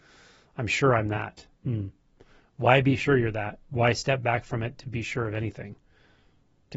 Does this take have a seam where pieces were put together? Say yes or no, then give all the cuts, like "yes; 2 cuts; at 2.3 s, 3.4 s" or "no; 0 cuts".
yes; 1 cut; at 1.5 s